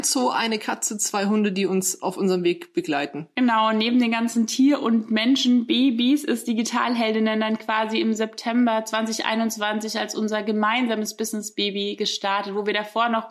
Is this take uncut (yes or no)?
yes